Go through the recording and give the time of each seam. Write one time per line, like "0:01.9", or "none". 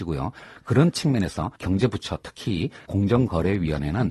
0:01.6
0:02.9